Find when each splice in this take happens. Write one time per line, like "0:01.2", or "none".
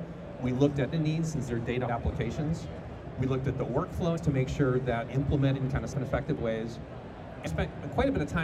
0:00.9
0:01.5
0:01.9
0:04.2
0:05.1
0:05.9
0:07.5